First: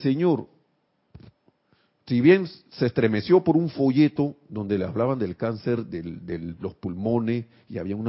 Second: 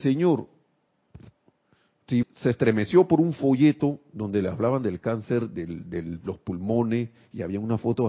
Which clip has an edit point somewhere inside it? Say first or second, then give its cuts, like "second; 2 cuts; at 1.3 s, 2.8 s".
second; 1 cut; at 2.2 s